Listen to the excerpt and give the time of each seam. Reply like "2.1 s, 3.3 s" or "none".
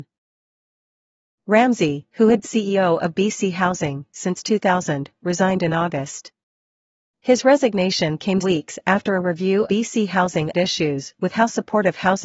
2.4 s, 8.4 s, 9.7 s, 10.5 s